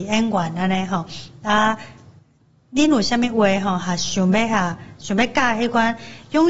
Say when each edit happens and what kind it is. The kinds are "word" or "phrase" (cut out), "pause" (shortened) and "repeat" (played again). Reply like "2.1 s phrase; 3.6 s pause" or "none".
none